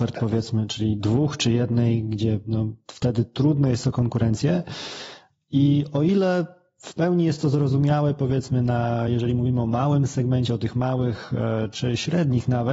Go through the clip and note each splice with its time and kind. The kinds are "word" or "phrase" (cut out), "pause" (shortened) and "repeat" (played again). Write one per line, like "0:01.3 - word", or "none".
none